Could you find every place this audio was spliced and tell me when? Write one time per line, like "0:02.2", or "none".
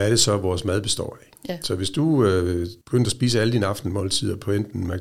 0:01.4
0:02.8